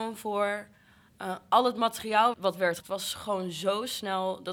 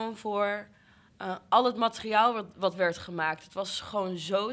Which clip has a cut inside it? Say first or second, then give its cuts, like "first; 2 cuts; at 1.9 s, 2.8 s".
first; 2 cuts; at 2.3 s, 2.8 s